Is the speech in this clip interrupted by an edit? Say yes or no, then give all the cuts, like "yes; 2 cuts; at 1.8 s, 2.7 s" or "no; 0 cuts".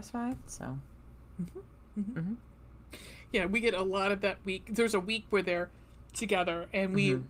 no; 0 cuts